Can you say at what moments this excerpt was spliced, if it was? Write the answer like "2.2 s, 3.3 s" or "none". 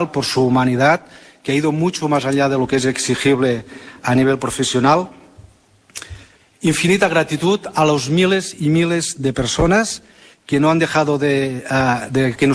none